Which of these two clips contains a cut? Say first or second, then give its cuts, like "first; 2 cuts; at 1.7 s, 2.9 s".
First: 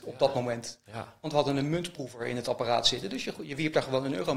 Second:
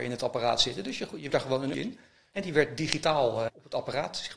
second; 3 cuts; at 1.3 s, 1.7 s, 3.5 s